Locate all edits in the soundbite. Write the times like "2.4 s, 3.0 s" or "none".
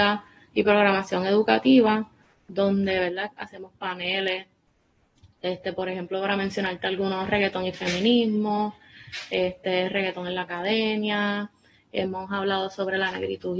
none